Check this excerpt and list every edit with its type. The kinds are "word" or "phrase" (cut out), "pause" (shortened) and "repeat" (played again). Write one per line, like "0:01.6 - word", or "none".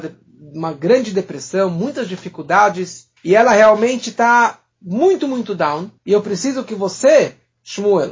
0:03.2 - pause
0:04.7 - pause
0:06.0 - pause